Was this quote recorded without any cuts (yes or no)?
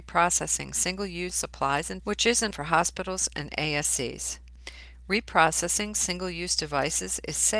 no